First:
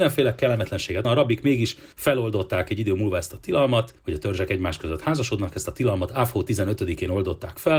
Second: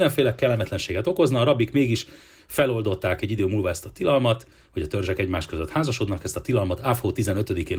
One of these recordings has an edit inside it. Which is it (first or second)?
first